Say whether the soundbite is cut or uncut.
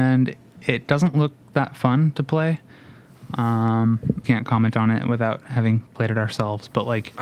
cut